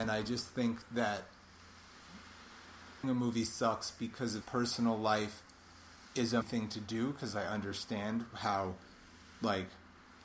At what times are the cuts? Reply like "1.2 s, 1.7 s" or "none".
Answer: 3.0 s, 4.4 s, 6.4 s